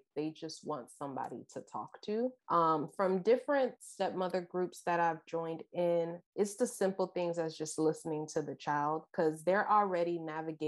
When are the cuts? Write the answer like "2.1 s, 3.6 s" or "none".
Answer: 2.4 s, 6.3 s